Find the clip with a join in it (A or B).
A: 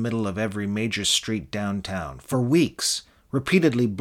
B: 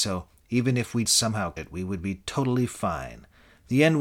B